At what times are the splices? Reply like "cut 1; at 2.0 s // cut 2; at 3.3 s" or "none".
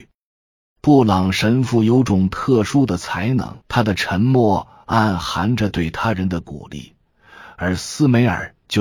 cut 1; at 3.6 s